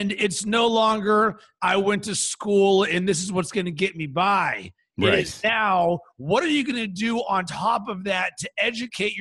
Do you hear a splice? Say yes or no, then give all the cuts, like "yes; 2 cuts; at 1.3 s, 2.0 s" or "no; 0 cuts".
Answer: no; 0 cuts